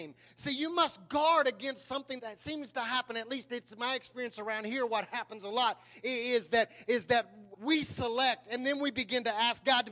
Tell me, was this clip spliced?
yes; 2 cuts; at 2.2 s, 7.5 s

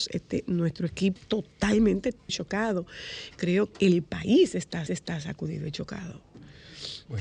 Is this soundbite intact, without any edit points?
no; 4 cuts; at 1.2 s, 2.3 s, 3.7 s, 4.9 s

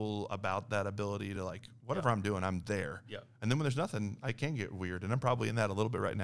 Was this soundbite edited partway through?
no; 0 cuts

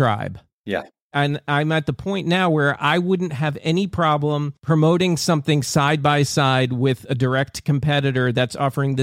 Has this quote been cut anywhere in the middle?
no; 0 cuts

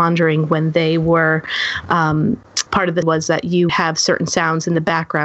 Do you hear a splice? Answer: yes; 3 cuts; at 2.7 s, 3.0 s, 3.7 s

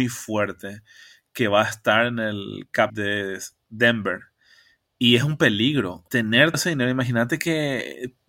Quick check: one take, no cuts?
no; 3 cuts; at 2.9 s, 6.1 s, 6.5 s

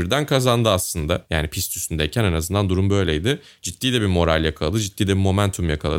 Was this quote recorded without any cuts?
yes; 0 cuts

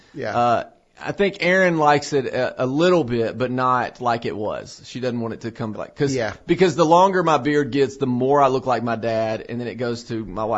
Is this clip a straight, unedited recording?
no; 1 cut; at 5.7 s

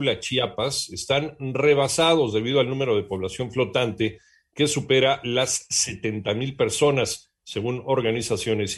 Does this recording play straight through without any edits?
yes; 0 cuts

